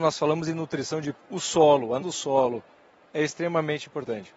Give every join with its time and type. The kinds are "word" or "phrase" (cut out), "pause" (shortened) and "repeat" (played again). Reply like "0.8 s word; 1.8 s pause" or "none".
1.1 s word; 2.0 s word